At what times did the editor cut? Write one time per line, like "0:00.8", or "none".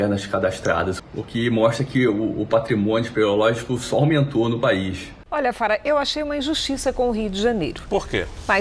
0:05.3